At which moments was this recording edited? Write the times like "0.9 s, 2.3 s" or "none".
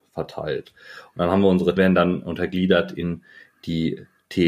1.8 s